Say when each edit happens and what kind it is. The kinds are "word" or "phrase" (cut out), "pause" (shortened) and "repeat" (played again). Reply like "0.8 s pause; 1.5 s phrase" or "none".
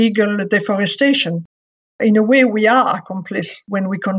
none